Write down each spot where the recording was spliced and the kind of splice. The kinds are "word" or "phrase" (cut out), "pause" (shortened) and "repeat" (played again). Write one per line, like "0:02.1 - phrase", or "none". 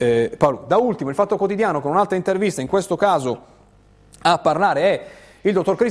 none